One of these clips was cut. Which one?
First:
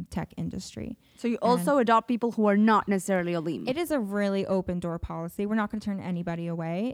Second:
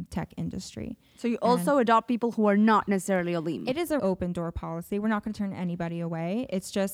second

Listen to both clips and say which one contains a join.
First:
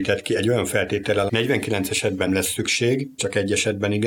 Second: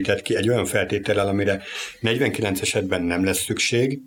first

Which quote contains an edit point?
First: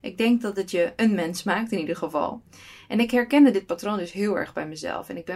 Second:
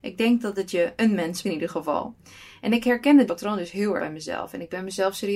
second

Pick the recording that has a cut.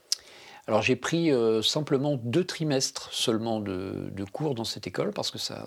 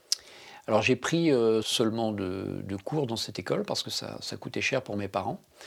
second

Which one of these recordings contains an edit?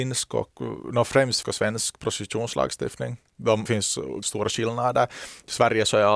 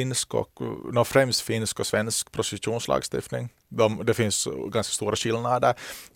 first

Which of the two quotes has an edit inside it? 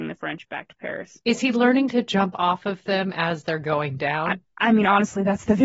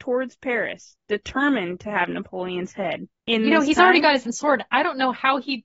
second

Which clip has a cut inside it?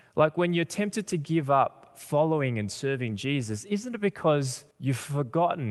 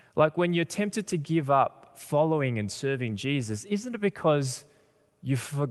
first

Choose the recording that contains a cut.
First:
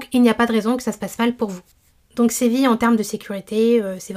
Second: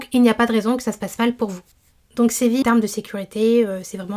second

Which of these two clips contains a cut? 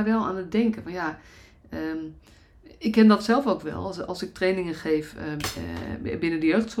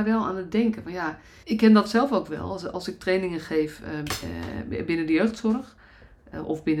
second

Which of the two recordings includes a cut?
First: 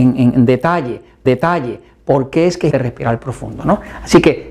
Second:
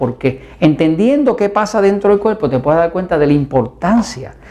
first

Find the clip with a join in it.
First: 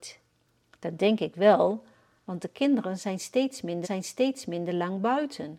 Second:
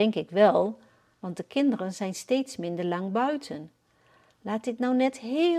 first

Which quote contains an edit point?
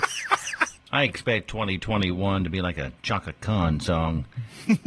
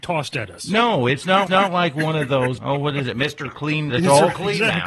second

